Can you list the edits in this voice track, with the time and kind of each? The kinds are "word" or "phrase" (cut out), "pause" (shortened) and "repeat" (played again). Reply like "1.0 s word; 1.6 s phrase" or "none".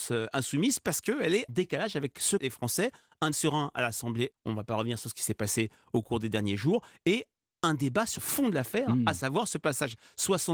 1.5 s word; 2.4 s word; 3.3 s word; 4.3 s word; 7.4 s word; 8.2 s word